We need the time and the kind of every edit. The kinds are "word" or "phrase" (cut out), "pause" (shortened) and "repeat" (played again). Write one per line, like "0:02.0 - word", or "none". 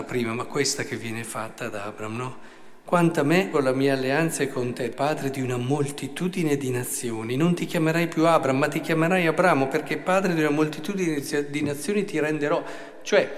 0:03.5 - word
0:04.9 - word